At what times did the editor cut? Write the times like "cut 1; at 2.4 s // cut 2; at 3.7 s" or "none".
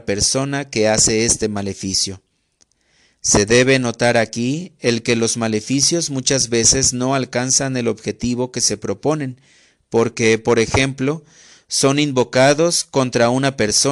none